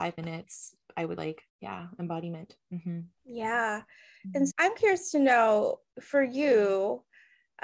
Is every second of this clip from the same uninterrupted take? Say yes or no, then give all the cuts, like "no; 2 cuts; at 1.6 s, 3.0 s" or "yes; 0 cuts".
no; 4 cuts; at 1.2 s, 1.5 s, 3.2 s, 4.5 s